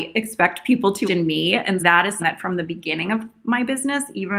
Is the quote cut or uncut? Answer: cut